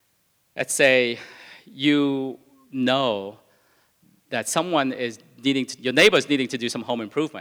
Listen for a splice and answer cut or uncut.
uncut